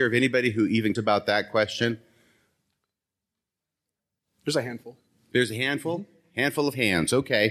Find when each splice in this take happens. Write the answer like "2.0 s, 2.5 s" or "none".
1.0 s